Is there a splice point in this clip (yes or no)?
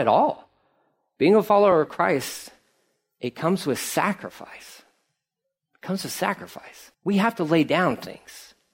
yes